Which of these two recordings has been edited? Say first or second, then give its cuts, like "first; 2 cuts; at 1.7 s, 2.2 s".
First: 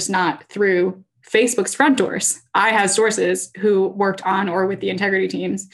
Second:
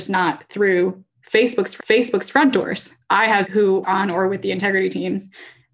second; 3 cuts; at 1.8 s, 3.4 s, 3.8 s